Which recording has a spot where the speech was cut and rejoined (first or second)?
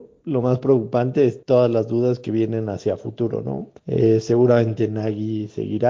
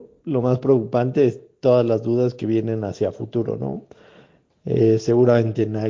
first